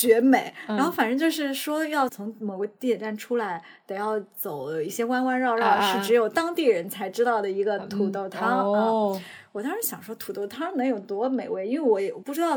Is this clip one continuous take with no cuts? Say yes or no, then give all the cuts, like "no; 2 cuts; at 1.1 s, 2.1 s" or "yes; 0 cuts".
yes; 0 cuts